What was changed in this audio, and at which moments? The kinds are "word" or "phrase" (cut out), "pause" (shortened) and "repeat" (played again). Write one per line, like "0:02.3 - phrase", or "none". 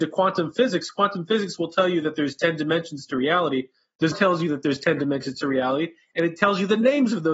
0:04.1 - word